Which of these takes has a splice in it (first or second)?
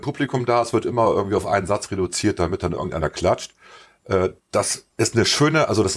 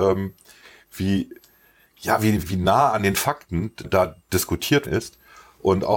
second